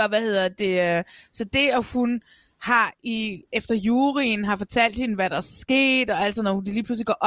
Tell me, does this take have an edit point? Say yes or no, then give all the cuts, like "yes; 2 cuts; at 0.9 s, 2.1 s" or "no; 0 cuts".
no; 0 cuts